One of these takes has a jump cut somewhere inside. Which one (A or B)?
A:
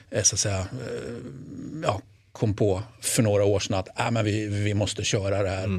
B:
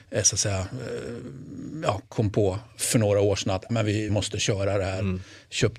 B